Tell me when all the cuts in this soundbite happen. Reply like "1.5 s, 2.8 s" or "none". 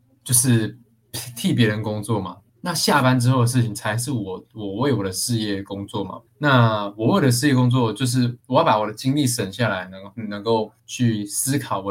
2.5 s, 6.3 s, 8.4 s, 10.8 s